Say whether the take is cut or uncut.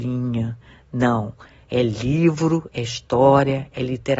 uncut